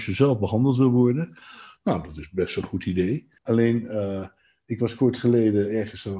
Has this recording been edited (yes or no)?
yes